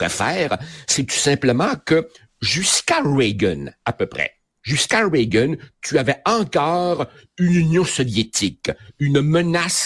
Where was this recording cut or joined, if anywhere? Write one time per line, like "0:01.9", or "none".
none